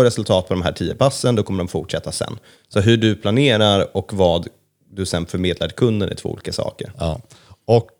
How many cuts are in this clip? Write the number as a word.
zero